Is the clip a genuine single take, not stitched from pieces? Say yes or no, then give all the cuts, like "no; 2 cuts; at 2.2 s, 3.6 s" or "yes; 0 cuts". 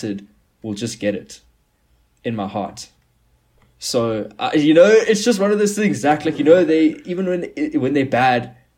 yes; 0 cuts